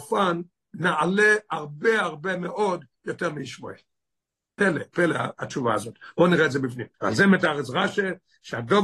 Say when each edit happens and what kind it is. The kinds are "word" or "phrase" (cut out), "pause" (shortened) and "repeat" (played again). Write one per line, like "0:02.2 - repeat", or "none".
0:02.0 - word
0:06.9 - pause